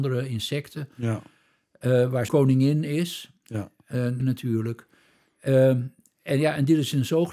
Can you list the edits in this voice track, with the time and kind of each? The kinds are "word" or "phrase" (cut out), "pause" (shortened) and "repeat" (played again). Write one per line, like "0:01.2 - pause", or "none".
0:02.3 - word
0:04.2 - phrase